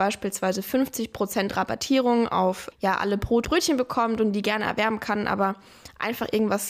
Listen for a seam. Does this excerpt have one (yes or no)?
yes